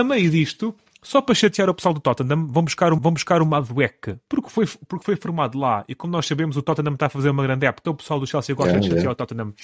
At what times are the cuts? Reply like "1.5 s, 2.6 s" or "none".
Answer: 3.0 s, 7.8 s